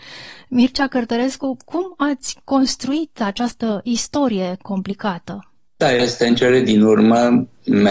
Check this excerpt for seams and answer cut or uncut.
uncut